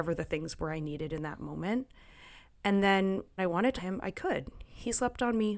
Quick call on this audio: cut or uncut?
cut